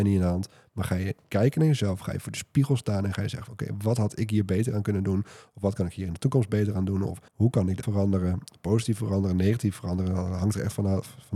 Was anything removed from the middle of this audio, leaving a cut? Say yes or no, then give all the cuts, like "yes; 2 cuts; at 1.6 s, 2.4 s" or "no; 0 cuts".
yes; 3 cuts; at 1.2 s, 7.3 s, 7.8 s